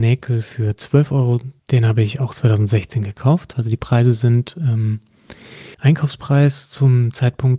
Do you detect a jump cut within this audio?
yes; 2 cuts; at 1.6 s, 5.7 s

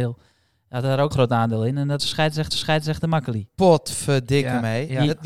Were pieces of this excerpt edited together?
yes; 3 cuts; at 1.1 s, 2.0 s, 2.5 s

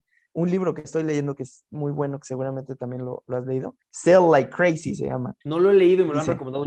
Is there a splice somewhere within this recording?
yes; 2 cuts; at 3.8 s, 5.4 s

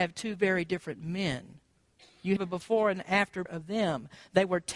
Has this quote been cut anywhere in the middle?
yes; 2 cuts; at 2.4 s, 3.5 s

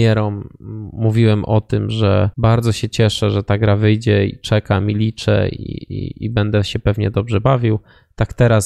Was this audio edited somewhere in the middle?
yes; 1 cut; at 2.3 s

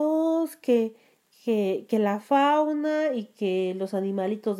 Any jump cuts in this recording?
no; 0 cuts

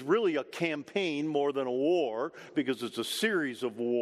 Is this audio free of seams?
yes; 0 cuts

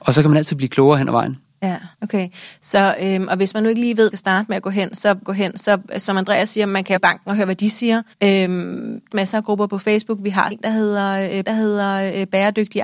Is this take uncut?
no; 8 cuts; at 1.9 s, 4.1 s, 5.2 s, 7.0 s, 8.1 s, 9.1 s, 10.5 s, 11.4 s

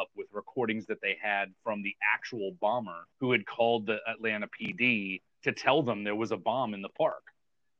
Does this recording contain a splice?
yes; 1 cut; at 3.1 s

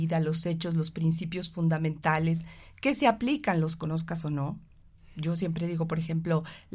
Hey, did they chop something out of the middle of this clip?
no; 0 cuts

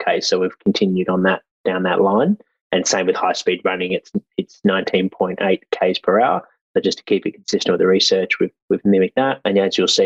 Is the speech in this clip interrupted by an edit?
no; 0 cuts

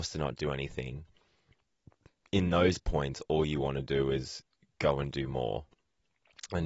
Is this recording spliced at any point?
no; 0 cuts

